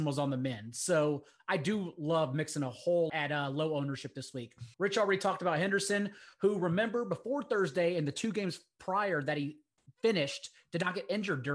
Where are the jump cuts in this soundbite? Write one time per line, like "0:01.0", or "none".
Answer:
0:03.1
0:04.7

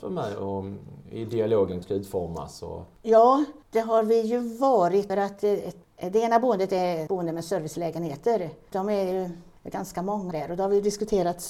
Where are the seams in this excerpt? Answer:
0:01.8
0:03.6
0:05.1
0:07.1
0:08.7
0:10.3

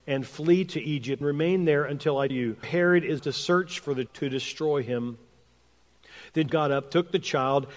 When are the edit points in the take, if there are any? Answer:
0:01.2
0:02.3
0:02.6
0:03.2
0:04.1
0:06.5

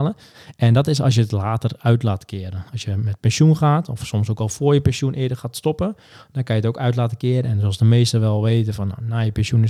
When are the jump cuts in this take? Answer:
none

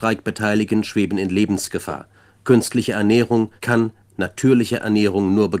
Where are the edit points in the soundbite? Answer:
0:03.6

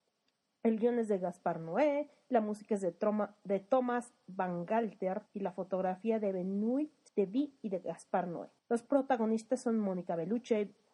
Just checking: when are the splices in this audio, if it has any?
0:05.3
0:07.1
0:08.6

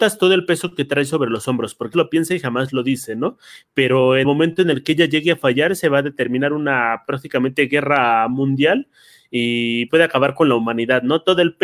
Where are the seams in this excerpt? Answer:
0:01.9
0:04.2
0:09.9

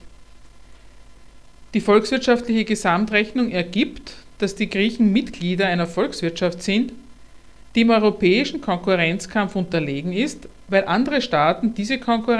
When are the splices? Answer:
0:07.6

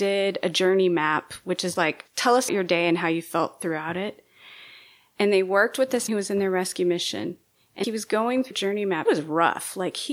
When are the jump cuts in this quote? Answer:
0:01.8
0:02.5
0:06.1
0:07.8
0:08.5
0:09.1

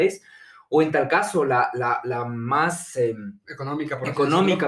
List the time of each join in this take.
none

